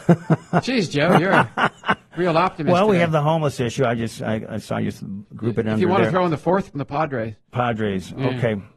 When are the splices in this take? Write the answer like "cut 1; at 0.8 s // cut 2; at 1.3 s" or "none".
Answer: cut 1; at 6.7 s